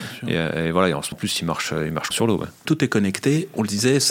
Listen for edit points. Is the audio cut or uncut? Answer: cut